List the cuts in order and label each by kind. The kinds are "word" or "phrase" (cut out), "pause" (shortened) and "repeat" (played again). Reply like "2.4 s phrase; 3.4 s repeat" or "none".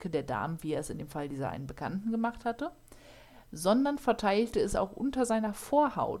none